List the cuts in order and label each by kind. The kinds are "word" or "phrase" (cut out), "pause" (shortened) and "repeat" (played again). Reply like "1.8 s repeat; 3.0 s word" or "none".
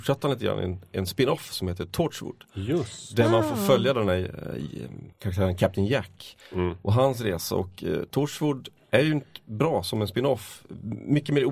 5.1 s pause

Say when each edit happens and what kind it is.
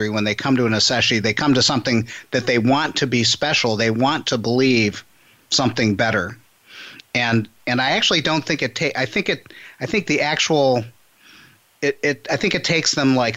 none

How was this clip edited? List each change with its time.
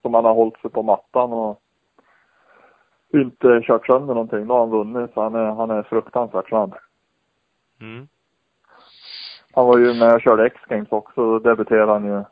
none

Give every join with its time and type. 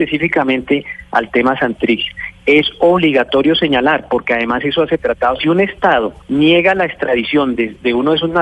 5.0 s phrase; 5.4 s phrase; 6.2 s pause

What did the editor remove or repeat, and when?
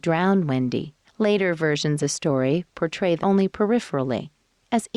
1.0 s pause; 2.0 s word; 3.2 s word

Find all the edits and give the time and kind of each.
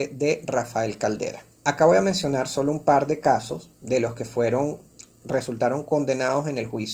1.5 s pause

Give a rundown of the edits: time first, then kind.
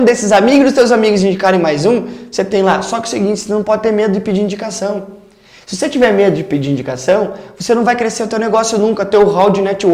none

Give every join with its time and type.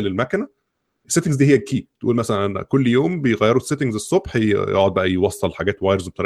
none

